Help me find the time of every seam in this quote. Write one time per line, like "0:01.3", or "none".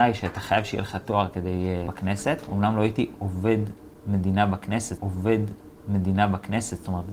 0:01.9
0:05.0

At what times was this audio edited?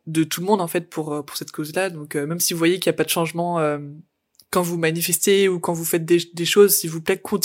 none

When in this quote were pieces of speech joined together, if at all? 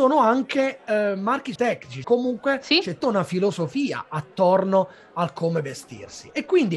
0:01.6
0:02.0
0:03.0

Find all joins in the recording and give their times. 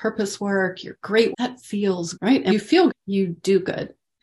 0:01.3
0:02.1
0:02.5
0:02.9

